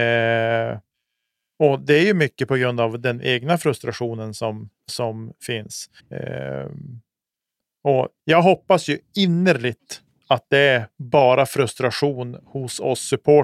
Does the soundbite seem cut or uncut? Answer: cut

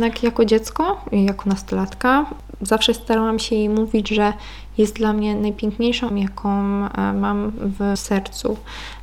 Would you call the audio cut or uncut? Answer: cut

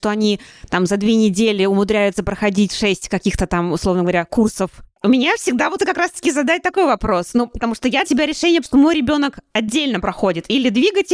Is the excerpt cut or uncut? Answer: cut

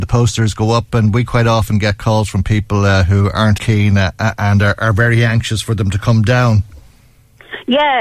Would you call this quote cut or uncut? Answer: cut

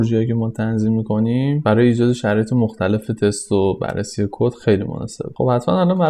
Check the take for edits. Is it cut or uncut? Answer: uncut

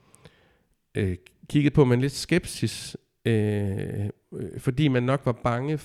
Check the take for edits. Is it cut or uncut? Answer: uncut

